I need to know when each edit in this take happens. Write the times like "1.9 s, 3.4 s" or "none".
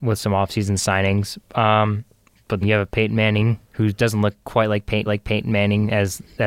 2.6 s, 3.6 s, 5.1 s